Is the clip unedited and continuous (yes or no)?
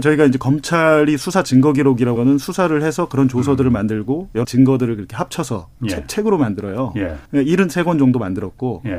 no